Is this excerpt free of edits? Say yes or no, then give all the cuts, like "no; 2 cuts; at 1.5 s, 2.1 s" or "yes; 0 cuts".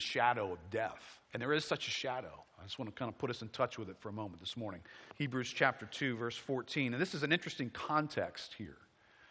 no; 3 cuts; at 1.2 s, 2.5 s, 5.1 s